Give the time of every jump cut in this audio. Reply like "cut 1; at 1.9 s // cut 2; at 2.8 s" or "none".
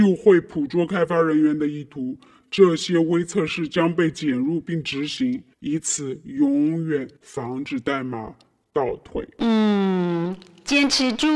cut 1; at 5.5 s // cut 2; at 7.2 s